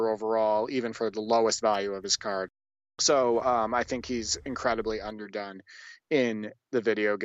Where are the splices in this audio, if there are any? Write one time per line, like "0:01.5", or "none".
none